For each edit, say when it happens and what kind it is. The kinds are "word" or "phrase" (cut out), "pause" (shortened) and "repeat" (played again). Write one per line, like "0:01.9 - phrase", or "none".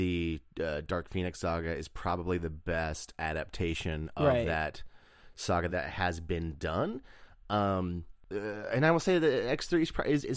0:05.7 - word